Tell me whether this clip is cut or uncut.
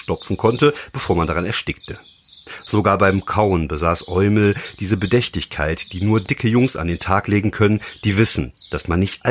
uncut